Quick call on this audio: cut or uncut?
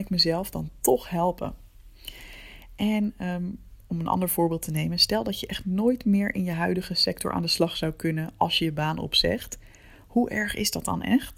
uncut